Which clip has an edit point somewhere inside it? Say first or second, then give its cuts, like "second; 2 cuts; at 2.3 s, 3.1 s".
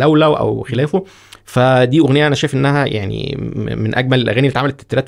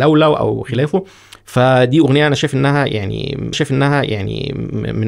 second; 1 cut; at 3.5 s